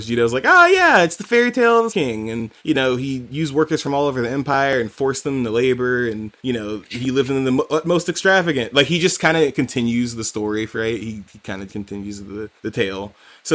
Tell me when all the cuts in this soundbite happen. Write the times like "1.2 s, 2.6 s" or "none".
1.9 s, 2.6 s, 6.4 s, 10.7 s, 11.7 s, 12.6 s